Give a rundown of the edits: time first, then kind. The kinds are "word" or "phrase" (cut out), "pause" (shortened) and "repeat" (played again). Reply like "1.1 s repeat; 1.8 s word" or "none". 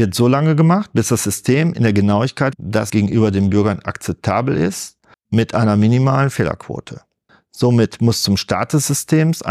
2.5 s word; 2.9 s word; 5.1 s pause; 7.3 s pause